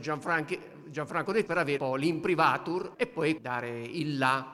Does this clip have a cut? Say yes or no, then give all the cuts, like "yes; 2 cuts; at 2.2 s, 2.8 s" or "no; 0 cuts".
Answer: yes; 4 cuts; at 1.5 s, 1.8 s, 2.9 s, 3.4 s